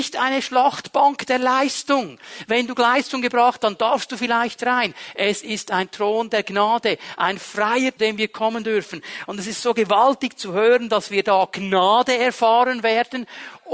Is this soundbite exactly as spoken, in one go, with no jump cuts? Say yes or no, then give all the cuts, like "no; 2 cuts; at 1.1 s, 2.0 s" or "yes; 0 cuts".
no; 3 cuts; at 2.7 s, 3.6 s, 8.0 s